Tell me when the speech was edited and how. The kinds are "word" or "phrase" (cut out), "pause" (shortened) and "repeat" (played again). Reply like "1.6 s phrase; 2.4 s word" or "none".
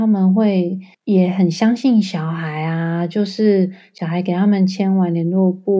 0.9 s pause